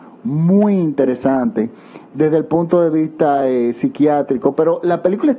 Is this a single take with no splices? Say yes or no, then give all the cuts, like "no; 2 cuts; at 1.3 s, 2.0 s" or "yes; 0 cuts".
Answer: yes; 0 cuts